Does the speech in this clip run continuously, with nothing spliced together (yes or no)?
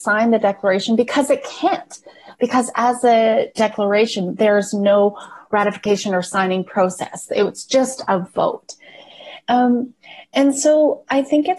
yes